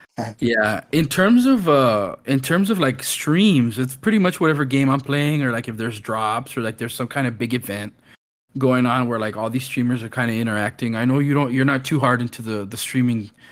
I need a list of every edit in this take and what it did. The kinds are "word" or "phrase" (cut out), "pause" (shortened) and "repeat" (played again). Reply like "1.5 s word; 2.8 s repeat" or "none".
none